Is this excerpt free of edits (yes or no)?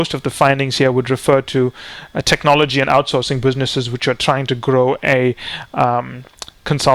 yes